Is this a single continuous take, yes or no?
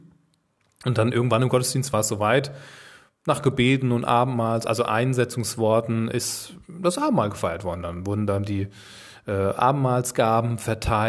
yes